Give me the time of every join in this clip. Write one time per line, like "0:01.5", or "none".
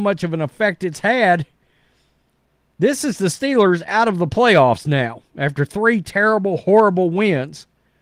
none